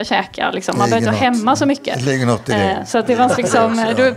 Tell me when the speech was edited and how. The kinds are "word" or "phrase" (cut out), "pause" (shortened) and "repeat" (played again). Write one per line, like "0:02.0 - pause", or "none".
none